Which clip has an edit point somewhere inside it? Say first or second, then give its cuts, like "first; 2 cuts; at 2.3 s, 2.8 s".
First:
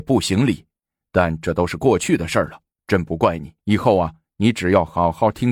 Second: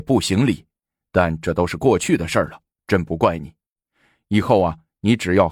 first; 1 cut; at 3.6 s